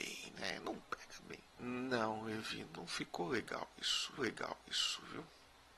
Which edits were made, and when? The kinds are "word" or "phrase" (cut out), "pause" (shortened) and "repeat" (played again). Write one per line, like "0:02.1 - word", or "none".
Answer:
0:02.6 - word
0:04.2 - repeat